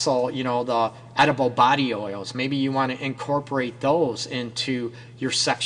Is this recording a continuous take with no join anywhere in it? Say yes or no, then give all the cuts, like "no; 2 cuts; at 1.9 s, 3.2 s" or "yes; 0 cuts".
yes; 0 cuts